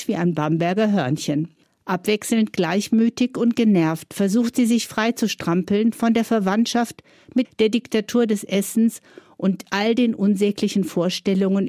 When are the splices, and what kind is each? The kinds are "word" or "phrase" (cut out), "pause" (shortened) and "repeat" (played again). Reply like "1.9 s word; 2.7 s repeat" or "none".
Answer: 1.6 s pause; 7.4 s phrase